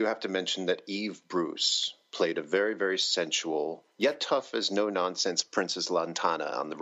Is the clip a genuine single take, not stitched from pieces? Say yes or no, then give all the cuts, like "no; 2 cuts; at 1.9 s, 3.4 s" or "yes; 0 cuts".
no; 1 cut; at 3.9 s